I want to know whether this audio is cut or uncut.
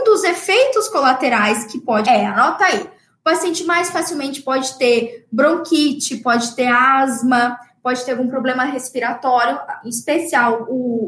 cut